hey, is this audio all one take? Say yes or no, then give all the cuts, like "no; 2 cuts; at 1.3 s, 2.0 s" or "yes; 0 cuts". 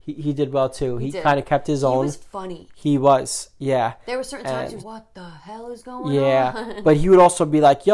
no; 1 cut; at 4.8 s